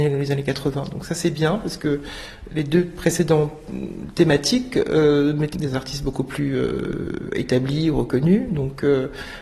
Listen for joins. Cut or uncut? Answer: cut